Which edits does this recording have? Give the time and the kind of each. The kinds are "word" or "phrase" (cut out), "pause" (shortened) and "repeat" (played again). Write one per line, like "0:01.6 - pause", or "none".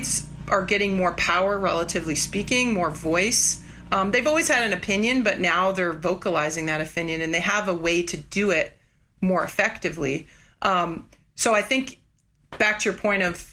none